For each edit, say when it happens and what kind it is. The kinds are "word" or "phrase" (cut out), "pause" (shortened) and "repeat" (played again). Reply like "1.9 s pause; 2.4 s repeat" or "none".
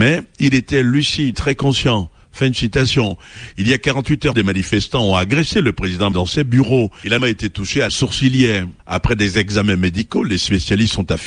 1.3 s word; 4.3 s word; 6.1 s word; 7.2 s word; 7.9 s word; 8.8 s pause